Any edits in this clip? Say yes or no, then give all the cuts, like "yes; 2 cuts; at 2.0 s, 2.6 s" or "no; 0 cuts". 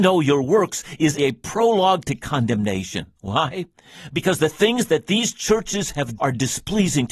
yes; 3 cuts; at 1.2 s, 3.2 s, 6.2 s